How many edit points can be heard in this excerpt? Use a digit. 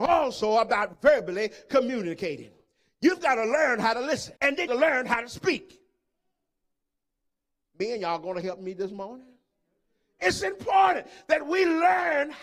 2